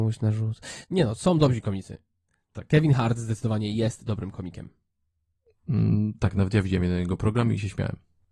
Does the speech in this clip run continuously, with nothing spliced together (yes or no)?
yes